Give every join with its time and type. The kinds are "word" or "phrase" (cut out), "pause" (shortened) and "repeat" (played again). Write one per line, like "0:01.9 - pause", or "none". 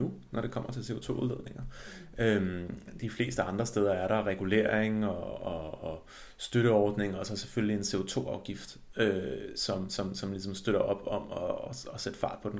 none